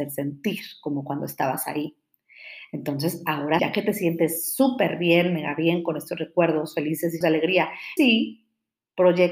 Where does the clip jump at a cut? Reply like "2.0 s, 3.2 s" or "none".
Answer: 3.6 s, 7.2 s, 8.0 s